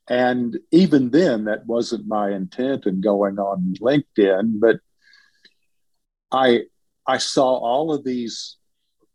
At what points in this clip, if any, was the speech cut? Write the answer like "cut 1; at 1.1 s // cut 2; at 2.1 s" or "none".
none